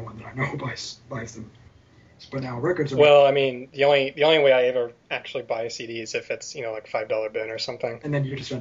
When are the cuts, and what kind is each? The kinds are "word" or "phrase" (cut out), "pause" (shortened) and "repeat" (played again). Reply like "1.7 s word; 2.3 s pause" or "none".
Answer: none

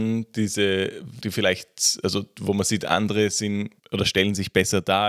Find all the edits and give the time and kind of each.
1.2 s word; 3.8 s pause

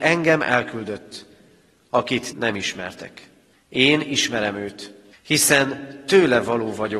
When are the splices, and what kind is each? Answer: 2.3 s word; 3.5 s pause; 5.1 s pause

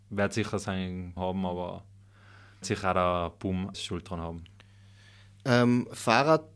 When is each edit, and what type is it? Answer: 1.2 s word; 2.6 s word; 3.7 s word

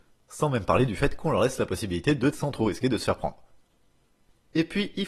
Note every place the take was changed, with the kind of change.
2.3 s word

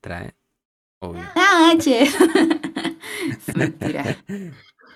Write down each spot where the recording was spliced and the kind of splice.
3.5 s word

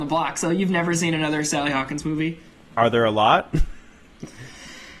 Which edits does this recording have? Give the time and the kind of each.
none

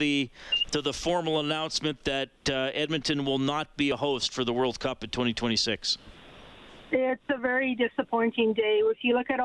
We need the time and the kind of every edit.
none

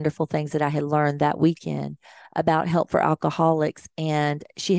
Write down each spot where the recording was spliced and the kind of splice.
none

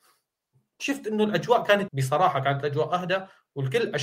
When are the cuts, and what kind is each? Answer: 1.9 s word

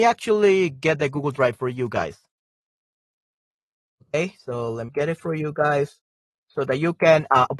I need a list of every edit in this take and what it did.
4.9 s word

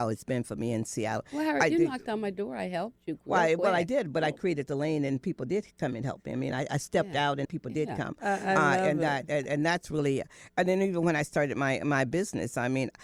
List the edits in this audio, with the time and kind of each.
7.4 s word

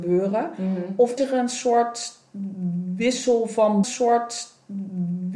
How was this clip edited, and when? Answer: 1.2 s word; 3.8 s repeat

